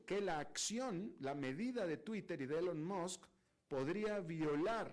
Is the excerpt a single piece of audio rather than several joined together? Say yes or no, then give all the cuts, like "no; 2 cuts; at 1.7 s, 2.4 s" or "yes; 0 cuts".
yes; 0 cuts